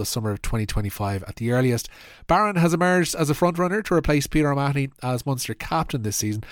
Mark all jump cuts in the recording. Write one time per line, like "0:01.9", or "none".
none